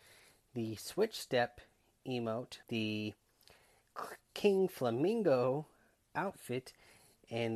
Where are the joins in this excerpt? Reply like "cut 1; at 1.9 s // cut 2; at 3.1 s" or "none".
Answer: cut 1; at 2.6 s